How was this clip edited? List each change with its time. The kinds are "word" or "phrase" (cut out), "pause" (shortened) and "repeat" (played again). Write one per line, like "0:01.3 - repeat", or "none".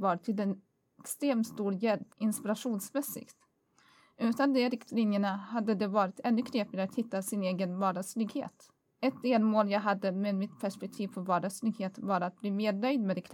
0:02.1 - pause